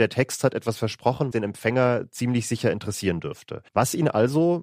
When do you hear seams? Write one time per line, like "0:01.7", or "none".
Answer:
0:01.3
0:03.7